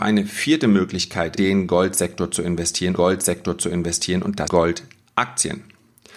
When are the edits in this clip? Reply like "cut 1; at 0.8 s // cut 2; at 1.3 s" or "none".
cut 1; at 1.4 s // cut 2; at 3.0 s // cut 3; at 4.5 s